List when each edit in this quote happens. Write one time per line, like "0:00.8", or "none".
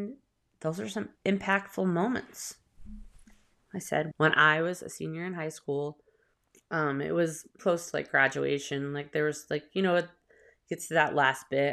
0:01.2
0:04.1
0:06.3
0:07.6